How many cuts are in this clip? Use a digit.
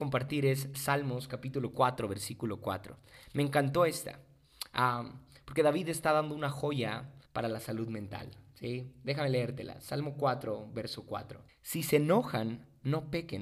2